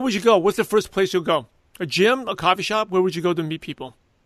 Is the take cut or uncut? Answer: uncut